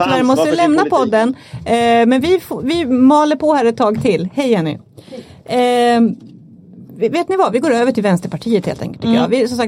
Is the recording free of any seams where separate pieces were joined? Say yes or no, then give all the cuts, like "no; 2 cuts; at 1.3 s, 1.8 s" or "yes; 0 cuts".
yes; 0 cuts